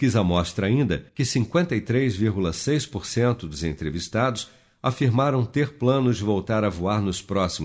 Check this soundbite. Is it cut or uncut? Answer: cut